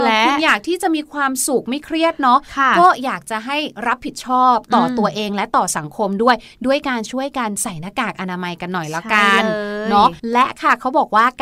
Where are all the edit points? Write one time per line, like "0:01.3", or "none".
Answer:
0:10.2